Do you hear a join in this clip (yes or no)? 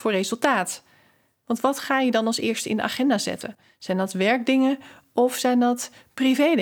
no